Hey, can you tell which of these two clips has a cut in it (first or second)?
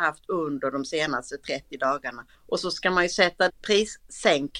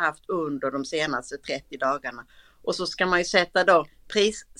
first